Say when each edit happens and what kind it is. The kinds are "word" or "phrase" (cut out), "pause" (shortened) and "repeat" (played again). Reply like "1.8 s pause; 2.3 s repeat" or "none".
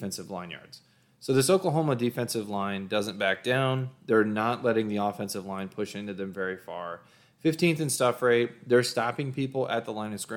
none